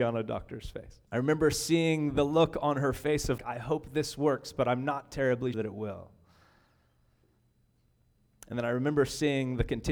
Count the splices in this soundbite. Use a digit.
3